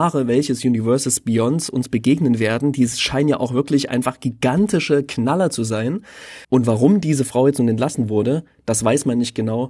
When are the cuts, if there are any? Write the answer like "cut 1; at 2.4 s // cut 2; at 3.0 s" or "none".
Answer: cut 1; at 6.4 s